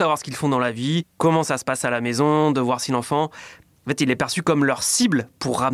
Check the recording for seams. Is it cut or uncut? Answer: uncut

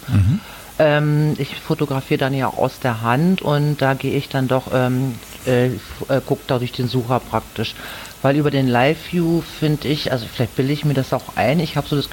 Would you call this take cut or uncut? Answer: uncut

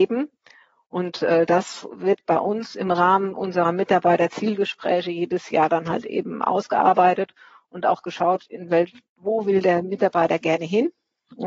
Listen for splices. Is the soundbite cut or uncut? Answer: uncut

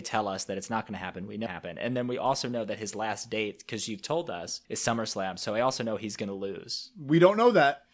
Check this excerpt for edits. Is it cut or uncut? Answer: cut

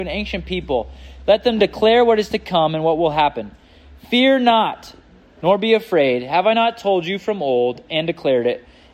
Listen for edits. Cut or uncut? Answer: uncut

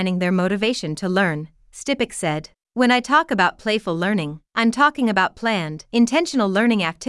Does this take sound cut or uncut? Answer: cut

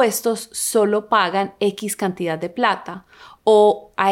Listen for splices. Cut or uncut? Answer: uncut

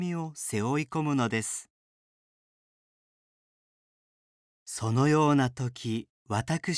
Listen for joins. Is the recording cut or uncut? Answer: uncut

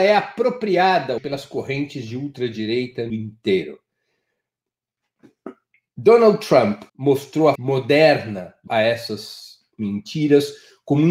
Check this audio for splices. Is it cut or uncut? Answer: cut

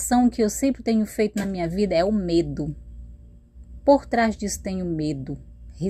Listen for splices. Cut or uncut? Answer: uncut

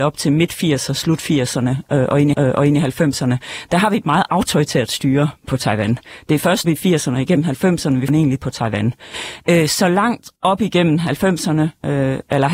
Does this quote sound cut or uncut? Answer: cut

